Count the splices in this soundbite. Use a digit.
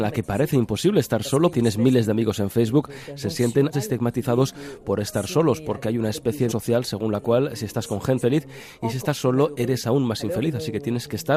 4